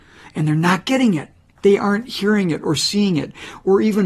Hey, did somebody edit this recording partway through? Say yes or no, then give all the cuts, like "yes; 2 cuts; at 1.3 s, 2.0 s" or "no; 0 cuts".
yes; 1 cut; at 1.5 s